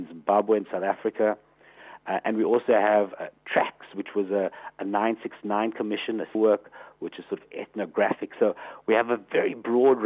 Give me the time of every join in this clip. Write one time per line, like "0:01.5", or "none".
0:06.3